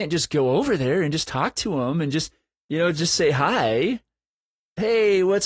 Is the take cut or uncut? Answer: uncut